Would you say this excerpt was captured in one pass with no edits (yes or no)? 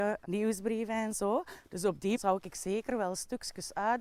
no